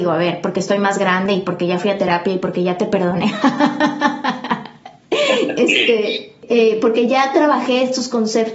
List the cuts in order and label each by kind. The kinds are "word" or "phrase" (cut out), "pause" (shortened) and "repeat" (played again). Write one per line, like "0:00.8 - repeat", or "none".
none